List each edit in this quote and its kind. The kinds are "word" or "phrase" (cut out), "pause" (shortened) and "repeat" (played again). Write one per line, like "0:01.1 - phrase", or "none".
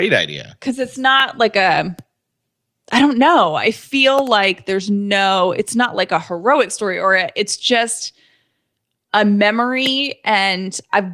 none